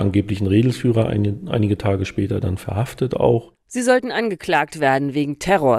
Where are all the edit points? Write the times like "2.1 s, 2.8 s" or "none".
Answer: none